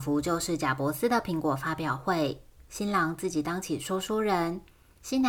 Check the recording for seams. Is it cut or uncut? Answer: uncut